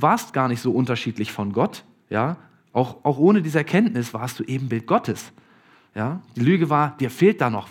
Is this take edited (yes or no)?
no